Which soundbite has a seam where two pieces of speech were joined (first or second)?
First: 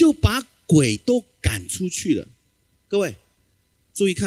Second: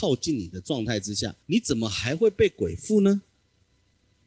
second